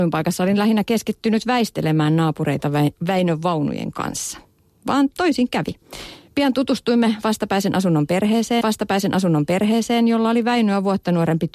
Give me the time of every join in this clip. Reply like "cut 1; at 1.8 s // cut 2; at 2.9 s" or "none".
cut 1; at 8.6 s